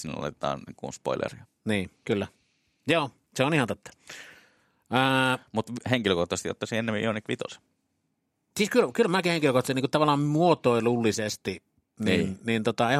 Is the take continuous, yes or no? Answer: yes